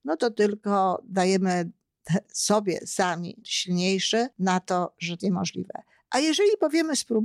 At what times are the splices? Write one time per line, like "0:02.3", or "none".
0:03.4
0:04.3
0:05.2